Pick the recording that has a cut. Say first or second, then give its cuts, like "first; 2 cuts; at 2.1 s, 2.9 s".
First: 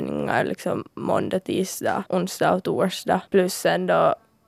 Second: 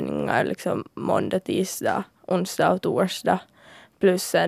first; 2 cuts; at 2.1 s, 3.3 s